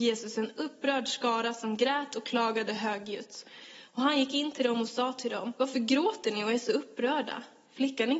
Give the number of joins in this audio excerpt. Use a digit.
1